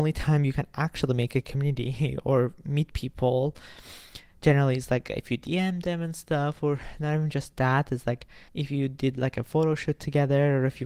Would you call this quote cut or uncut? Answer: cut